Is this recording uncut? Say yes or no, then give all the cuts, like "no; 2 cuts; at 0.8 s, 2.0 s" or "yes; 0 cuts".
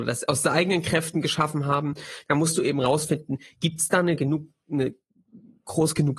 yes; 0 cuts